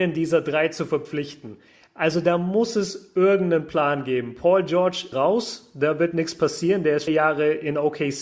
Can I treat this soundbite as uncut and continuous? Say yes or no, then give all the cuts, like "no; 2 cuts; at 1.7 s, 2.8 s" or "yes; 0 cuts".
no; 2 cuts; at 5.1 s, 7.1 s